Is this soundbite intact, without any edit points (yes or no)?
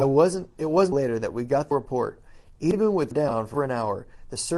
no